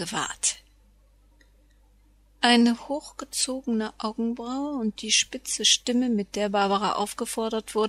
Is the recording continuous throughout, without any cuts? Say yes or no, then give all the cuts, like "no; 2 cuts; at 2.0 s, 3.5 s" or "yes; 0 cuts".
yes; 0 cuts